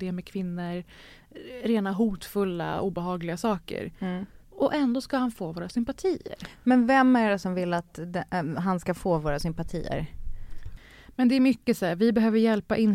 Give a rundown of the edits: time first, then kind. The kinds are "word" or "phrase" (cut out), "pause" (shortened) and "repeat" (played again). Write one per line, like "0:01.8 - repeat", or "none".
0:04.4 - pause